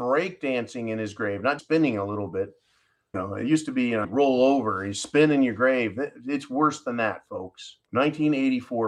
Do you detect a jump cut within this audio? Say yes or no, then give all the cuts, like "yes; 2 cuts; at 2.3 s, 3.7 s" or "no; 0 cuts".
yes; 4 cuts; at 1.6 s, 3.1 s, 4.0 s, 7.8 s